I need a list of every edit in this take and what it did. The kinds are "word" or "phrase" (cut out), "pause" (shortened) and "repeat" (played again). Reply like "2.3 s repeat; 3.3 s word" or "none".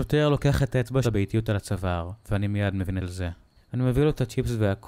1.0 s phrase; 2.2 s pause; 3.0 s phrase